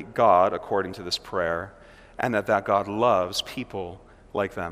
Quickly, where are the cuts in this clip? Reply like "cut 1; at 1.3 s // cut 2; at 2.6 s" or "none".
none